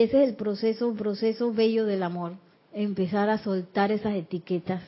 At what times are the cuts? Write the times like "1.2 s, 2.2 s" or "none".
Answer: 1.0 s, 2.5 s